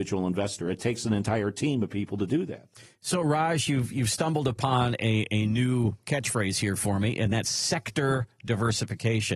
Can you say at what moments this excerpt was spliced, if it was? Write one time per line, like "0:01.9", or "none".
none